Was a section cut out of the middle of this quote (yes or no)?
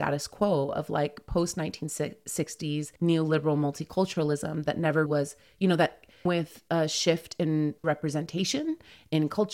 yes